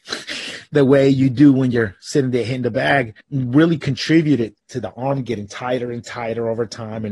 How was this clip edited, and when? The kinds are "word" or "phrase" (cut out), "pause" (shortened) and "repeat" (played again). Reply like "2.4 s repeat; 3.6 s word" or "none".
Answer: 3.2 s pause